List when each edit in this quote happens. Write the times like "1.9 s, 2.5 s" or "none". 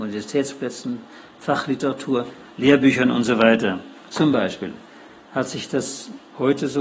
none